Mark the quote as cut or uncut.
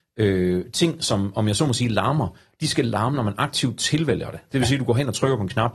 uncut